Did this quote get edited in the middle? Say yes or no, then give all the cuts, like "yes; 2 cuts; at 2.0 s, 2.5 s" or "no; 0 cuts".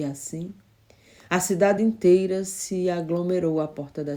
no; 0 cuts